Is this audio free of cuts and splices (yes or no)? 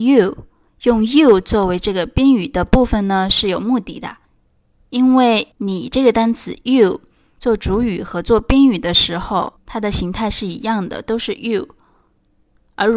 yes